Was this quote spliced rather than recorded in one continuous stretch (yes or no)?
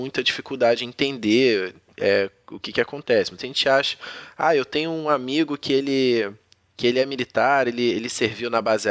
no